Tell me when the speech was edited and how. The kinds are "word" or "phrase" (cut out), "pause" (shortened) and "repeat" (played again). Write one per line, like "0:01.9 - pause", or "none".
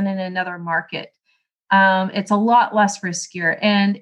none